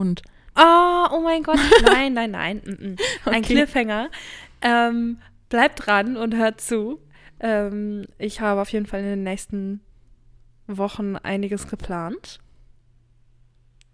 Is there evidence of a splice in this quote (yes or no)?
no